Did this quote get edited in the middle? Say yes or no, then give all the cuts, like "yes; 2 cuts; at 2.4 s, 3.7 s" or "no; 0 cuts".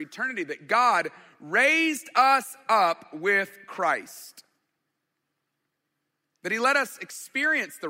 no; 0 cuts